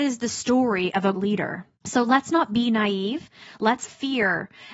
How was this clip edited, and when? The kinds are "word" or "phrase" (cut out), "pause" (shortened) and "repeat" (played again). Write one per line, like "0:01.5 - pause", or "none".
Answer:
0:01.1 - word
0:01.7 - pause
0:03.8 - word